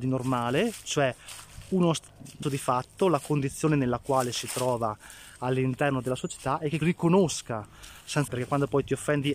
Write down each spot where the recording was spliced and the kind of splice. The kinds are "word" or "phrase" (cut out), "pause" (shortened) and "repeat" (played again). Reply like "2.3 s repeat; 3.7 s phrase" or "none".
2.4 s word; 6.8 s word; 8.3 s word

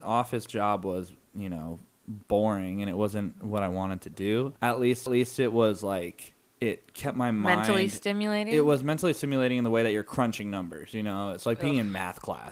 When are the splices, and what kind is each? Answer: 4.6 s pause; 5.1 s repeat; 6.4 s pause

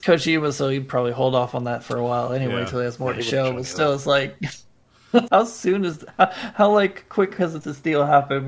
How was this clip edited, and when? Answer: 5.3 s word

